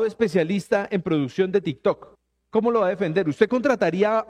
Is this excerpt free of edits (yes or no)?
no